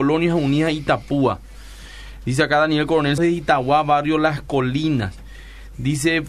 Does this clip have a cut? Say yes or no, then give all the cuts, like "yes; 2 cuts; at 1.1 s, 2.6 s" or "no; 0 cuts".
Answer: yes; 1 cut; at 3.2 s